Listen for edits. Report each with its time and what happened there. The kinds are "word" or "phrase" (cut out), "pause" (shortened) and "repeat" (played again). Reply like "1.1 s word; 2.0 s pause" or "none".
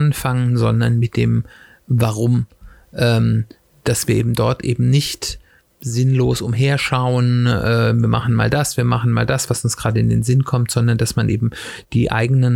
none